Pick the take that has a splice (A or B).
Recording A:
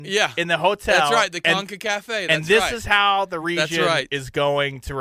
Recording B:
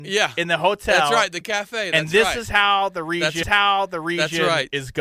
B